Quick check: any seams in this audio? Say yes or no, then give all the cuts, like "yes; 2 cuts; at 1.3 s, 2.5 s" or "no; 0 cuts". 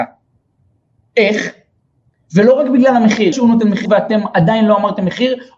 yes; 2 cuts; at 3.3 s, 3.9 s